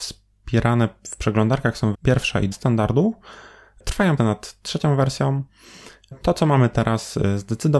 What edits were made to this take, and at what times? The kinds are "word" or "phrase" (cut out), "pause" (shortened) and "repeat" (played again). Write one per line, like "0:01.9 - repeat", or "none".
0:01.9 - word
0:02.5 - word
0:04.2 - word
0:06.1 - word